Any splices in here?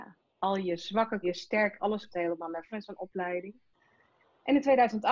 yes; 4 cuts; at 1.2 s, 1.8 s, 2.1 s, 2.7 s

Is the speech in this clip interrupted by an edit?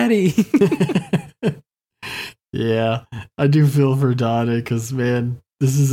no; 0 cuts

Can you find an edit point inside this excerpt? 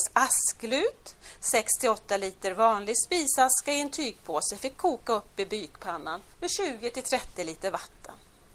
yes; 1 cut; at 6.3 s

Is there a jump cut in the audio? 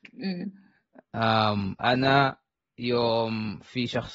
yes; 1 cut; at 1.8 s

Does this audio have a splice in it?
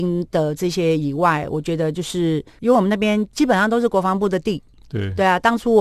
yes; 1 cut; at 2.5 s

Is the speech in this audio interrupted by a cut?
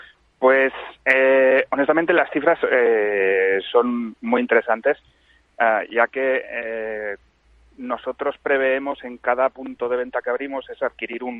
no; 0 cuts

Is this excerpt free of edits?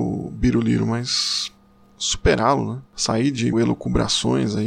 no; 2 cuts; at 2.9 s, 3.5 s

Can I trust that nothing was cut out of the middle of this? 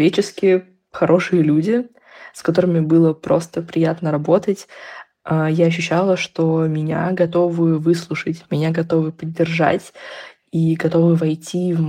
yes; 0 cuts

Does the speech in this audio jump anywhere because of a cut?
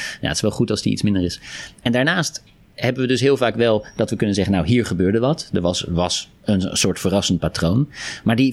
no; 0 cuts

